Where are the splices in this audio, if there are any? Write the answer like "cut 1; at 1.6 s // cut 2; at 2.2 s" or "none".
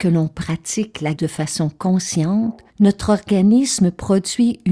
cut 1; at 1.2 s // cut 2; at 2.7 s